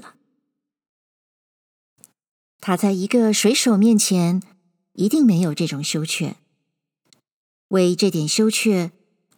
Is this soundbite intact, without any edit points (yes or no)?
yes